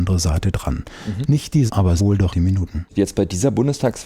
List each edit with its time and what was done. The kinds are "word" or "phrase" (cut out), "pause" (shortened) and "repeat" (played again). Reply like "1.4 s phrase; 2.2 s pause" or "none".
1.7 s word; 2.0 s word; 2.3 s word